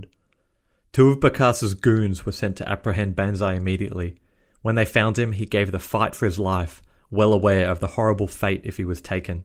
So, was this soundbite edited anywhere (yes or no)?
no